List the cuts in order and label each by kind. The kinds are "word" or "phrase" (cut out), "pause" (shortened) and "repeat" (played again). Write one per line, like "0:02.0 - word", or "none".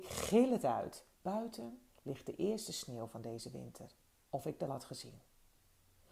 0:01.1 - pause
0:04.0 - pause
0:04.7 - word